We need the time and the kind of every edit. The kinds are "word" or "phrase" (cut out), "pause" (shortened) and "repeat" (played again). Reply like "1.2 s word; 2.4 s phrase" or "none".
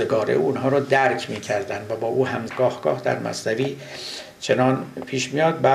2.5 s phrase